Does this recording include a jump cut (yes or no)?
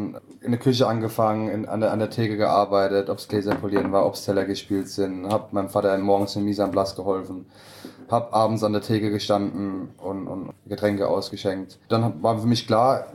yes